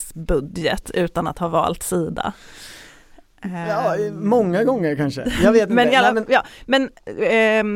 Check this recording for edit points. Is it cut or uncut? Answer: uncut